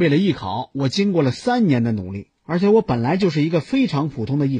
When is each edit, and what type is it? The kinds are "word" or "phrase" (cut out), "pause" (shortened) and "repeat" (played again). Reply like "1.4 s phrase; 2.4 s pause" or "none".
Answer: 2.4 s pause